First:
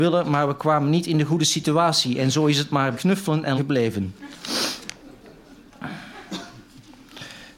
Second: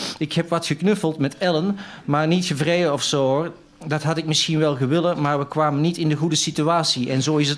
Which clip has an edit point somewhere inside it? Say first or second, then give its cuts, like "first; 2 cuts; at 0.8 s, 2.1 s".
first; 2 cuts; at 2.9 s, 3.6 s